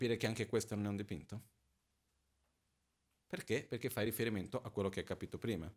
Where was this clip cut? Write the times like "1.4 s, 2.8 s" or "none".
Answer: none